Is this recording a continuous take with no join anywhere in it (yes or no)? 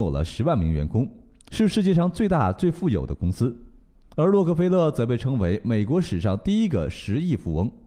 yes